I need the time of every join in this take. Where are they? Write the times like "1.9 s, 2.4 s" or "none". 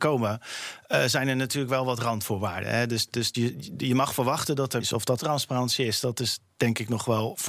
3.3 s, 4.8 s, 5.2 s